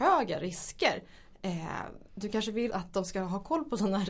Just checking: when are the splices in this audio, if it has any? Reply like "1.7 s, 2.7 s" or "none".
2.1 s, 2.7 s